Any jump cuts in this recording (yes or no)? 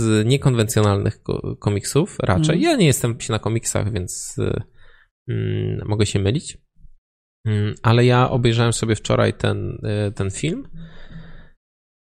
yes